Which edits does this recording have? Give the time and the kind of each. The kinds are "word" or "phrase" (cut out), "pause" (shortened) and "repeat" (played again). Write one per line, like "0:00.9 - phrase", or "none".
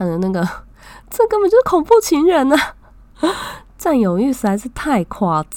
none